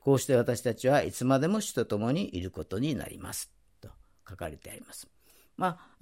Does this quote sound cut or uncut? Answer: uncut